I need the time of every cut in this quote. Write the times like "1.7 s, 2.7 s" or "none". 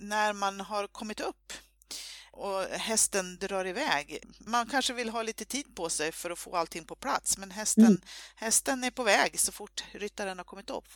none